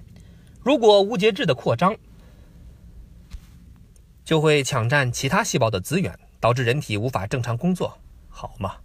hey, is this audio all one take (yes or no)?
yes